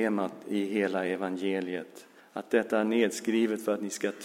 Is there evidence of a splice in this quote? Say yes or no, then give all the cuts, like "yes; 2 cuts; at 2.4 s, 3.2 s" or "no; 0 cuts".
yes; 1 cut; at 2.2 s